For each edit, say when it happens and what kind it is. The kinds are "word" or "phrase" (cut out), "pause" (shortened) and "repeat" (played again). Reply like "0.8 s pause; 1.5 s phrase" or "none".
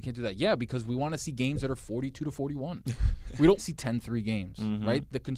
3.6 s word

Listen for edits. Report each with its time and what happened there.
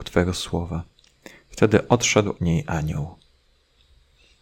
2.4 s word

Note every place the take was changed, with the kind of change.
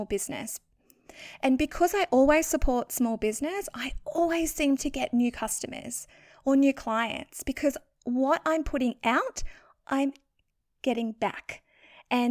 none

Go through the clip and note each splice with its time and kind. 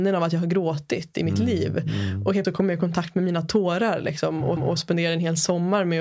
2.4 s word; 4.6 s repeat

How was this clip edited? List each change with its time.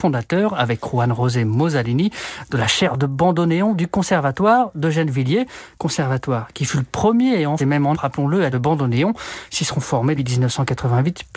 7.6 s word; 7.9 s word; 8.5 s phrase; 10.2 s word

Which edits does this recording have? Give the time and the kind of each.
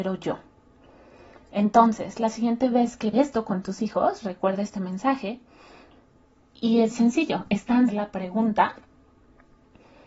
3.1 s word; 6.9 s word; 7.9 s phrase

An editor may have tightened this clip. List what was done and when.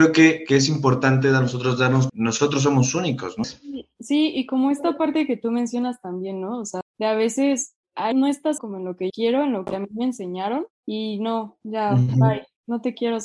2.1 s phrase; 6.8 s word; 8.1 s word; 8.6 s word; 9.1 s word; 10.7 s pause

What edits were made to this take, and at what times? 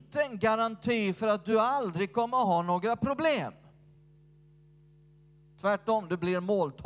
none

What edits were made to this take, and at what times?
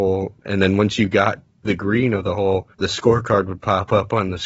1.7 s word; 2.7 s pause

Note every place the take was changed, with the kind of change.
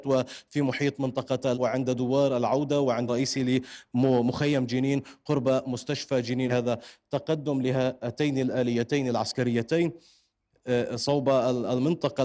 1.5 s word; 3.1 s word; 6.5 s word

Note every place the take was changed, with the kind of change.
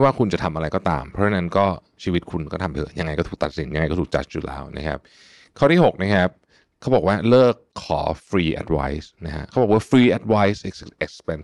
none

